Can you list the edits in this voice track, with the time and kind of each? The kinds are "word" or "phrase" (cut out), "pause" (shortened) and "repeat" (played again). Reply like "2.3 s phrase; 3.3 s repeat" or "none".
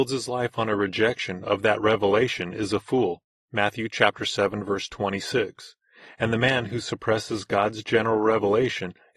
none